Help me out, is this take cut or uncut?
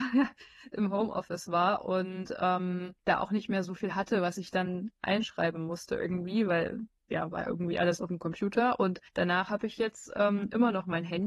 cut